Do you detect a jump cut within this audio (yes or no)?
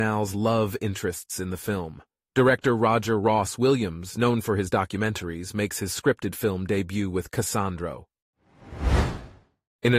no